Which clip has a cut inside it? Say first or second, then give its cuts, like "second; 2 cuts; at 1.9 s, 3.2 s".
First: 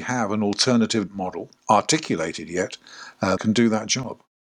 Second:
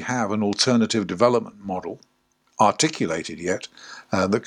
first; 3 cuts; at 1.1 s, 1.6 s, 3.4 s